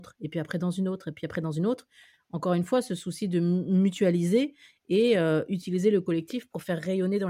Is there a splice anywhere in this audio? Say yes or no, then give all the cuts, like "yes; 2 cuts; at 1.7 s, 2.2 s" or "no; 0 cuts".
no; 0 cuts